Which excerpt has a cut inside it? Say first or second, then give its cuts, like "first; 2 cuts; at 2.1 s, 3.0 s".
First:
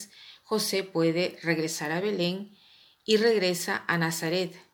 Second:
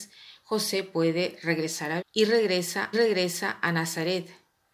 second; 2 cuts; at 2.0 s, 2.9 s